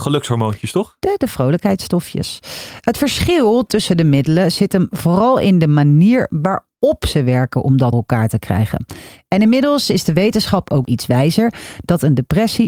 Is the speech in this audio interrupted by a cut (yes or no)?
yes